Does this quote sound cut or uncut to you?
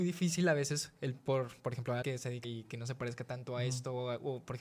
cut